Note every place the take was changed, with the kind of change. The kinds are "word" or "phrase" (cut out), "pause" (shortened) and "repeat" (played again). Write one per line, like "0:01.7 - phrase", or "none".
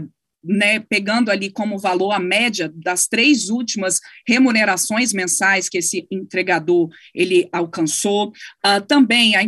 none